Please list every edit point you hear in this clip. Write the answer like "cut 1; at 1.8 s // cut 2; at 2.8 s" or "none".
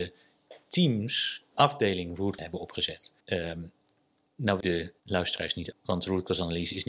cut 1; at 1.5 s // cut 2; at 2.4 s // cut 3; at 3.2 s // cut 4; at 4.6 s // cut 5; at 5.0 s // cut 6; at 5.7 s